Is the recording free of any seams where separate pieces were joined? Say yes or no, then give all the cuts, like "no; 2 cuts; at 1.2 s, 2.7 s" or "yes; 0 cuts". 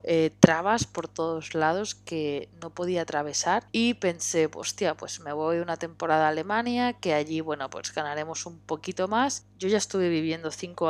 no; 1 cut; at 3.7 s